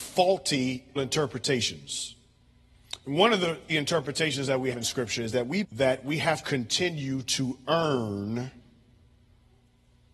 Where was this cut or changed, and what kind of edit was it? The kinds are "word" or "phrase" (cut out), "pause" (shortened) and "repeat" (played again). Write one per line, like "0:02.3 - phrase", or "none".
0:01.0 - word
0:03.7 - word
0:04.7 - word
0:05.6 - word
0:06.4 - word